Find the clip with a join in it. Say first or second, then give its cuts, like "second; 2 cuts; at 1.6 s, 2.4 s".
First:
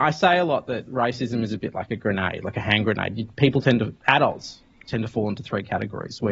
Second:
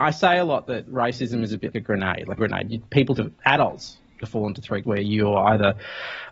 second; 5 cuts; at 1.7 s, 2.4 s, 3.2 s, 4.2 s, 4.8 s